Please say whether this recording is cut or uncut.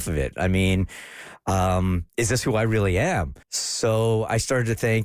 cut